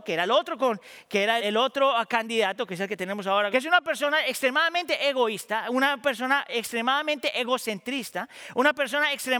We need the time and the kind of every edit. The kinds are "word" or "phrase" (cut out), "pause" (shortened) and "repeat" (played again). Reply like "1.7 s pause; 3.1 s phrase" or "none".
1.4 s word; 3.5 s phrase